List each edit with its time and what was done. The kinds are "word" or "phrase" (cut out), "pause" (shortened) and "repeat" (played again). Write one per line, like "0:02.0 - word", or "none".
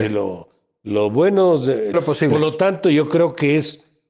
0:01.9 - phrase